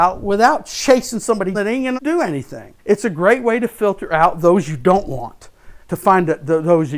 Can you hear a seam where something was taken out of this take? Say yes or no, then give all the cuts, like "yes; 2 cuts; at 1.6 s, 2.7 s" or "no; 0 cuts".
yes; 4 cuts; at 1.5 s, 2.0 s, 2.8 s, 5.8 s